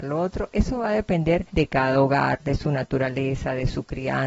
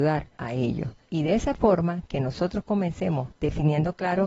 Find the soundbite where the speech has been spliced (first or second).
first